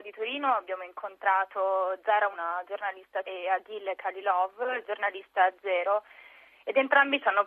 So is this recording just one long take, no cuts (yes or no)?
no